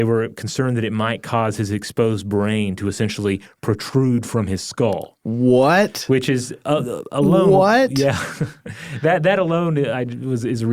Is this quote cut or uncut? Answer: uncut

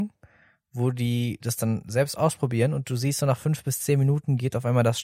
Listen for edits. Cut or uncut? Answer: uncut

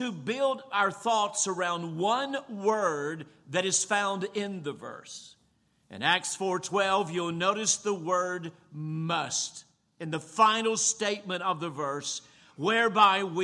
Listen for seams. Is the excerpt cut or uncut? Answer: uncut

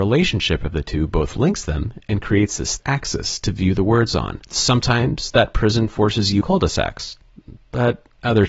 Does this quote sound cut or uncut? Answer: cut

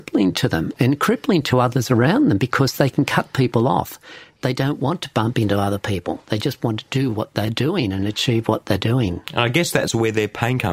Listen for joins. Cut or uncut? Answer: uncut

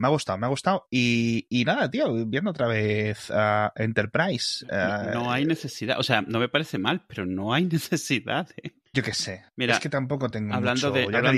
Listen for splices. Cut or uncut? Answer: uncut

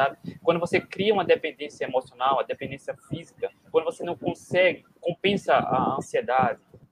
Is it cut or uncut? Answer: uncut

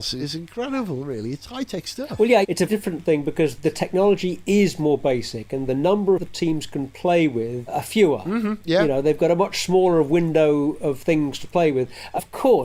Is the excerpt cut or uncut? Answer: cut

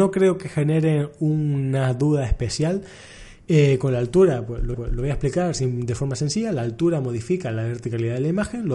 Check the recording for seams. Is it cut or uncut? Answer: cut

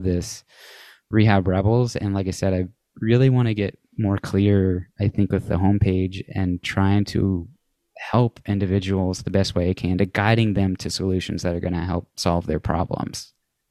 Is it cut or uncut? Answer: uncut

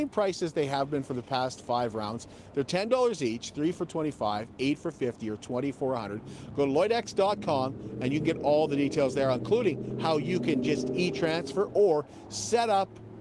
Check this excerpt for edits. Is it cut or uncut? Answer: uncut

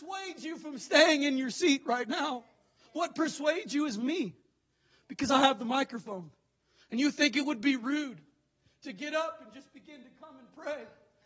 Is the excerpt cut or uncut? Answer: uncut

